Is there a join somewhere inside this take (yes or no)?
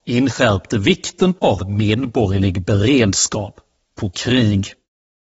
yes